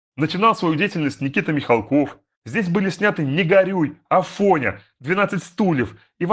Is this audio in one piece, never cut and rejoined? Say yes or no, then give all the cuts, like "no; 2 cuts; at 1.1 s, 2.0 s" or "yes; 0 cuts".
no; 1 cut; at 2.3 s